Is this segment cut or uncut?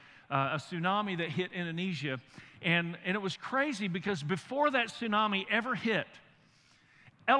uncut